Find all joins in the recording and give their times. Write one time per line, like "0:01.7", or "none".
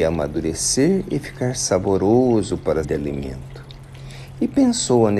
0:02.8